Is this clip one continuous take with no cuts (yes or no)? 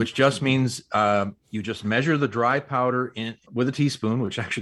no